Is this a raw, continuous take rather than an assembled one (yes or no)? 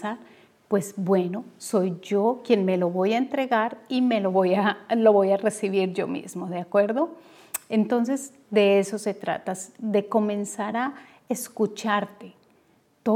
yes